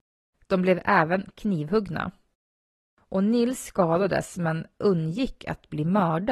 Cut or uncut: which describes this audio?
uncut